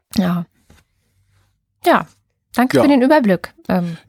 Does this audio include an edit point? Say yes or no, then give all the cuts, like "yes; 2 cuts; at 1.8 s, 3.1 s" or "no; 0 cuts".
no; 0 cuts